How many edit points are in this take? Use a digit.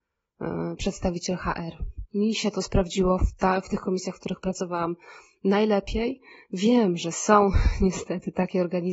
0